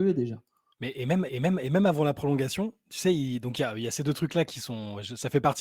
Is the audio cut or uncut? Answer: cut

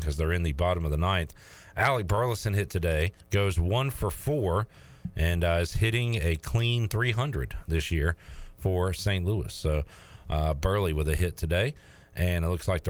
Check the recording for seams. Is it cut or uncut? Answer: cut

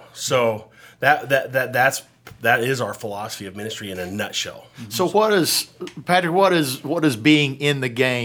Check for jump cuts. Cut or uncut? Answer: uncut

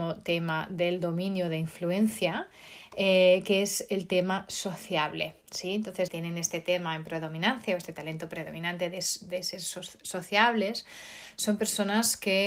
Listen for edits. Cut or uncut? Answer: cut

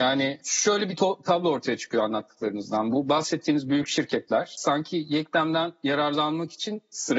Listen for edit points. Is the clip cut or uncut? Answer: uncut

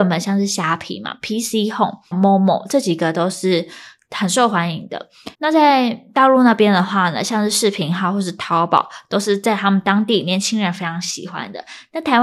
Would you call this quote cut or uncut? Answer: cut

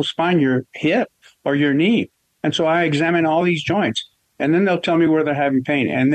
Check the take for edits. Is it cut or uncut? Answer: uncut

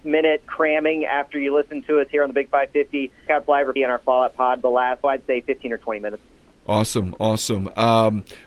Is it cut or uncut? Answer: cut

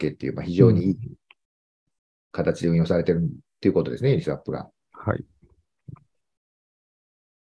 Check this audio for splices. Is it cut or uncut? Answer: uncut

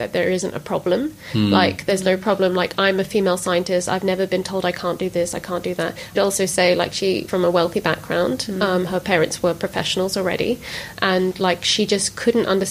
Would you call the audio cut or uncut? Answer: cut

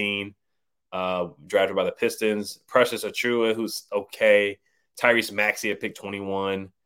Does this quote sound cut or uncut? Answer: uncut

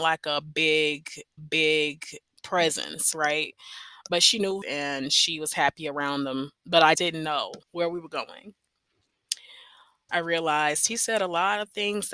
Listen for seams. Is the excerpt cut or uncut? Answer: cut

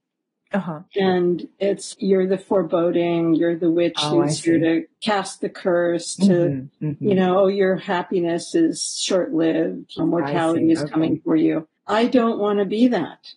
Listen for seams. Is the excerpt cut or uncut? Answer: cut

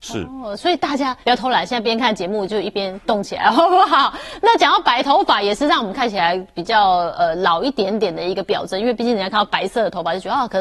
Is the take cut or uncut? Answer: cut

